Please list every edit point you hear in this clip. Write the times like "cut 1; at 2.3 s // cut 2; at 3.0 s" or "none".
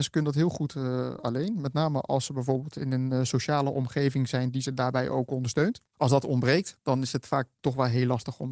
cut 1; at 5.9 s